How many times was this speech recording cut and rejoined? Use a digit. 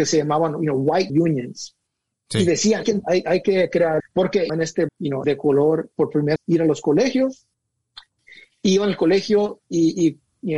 8